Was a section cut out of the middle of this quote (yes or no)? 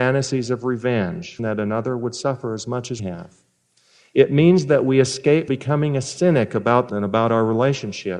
yes